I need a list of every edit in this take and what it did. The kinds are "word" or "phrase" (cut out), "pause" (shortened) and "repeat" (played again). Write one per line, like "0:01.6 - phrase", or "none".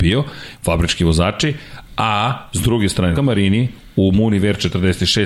0:03.2 - word

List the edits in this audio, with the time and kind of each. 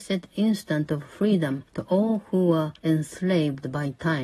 0:01.7 - pause
0:02.8 - pause

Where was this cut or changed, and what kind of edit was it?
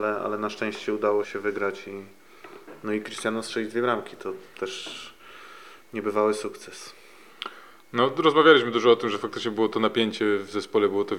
0:01.2 - word

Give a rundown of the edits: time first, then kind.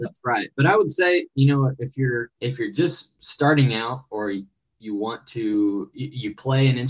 0:02.3 - pause

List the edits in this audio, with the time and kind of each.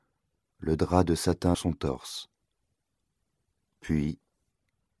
0:01.5 - phrase

